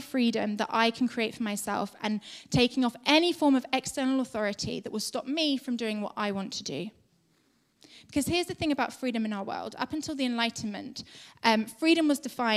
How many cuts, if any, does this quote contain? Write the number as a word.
zero